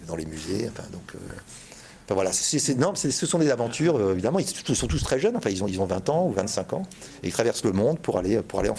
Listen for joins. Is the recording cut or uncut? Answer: uncut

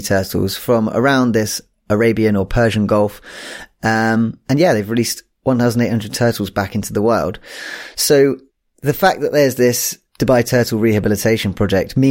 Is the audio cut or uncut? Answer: cut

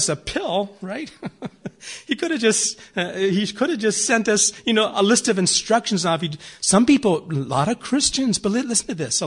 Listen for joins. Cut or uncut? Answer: uncut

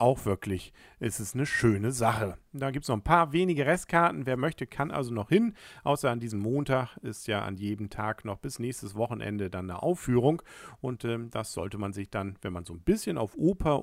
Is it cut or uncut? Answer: uncut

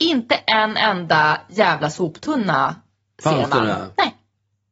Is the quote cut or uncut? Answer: uncut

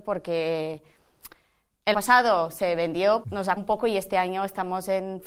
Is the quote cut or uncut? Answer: cut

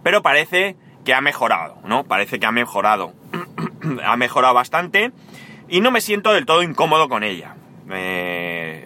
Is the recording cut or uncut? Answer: uncut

